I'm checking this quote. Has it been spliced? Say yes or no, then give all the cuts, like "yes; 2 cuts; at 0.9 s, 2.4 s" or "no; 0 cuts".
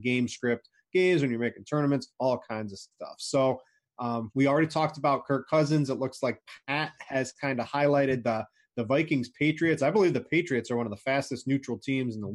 no; 0 cuts